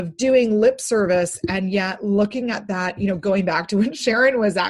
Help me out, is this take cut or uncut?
uncut